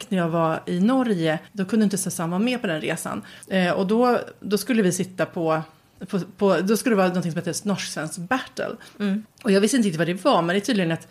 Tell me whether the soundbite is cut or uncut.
cut